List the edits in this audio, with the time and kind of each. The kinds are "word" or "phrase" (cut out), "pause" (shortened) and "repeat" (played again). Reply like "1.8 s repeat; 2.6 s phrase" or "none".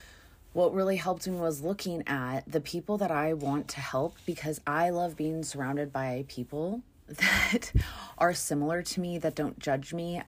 none